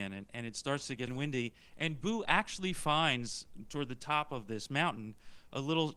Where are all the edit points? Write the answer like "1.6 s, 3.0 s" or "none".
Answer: 1.1 s